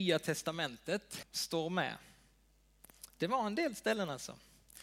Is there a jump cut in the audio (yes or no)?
yes